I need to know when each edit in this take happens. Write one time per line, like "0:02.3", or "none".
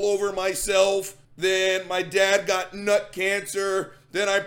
0:01.2